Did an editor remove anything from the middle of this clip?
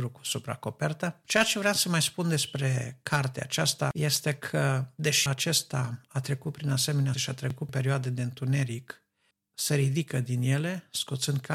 yes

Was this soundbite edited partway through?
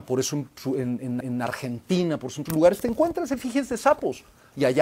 yes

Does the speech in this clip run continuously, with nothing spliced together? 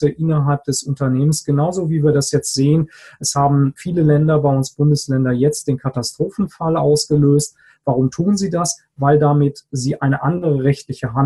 yes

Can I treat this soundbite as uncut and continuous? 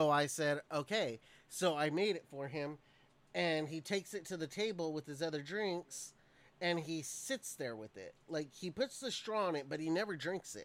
yes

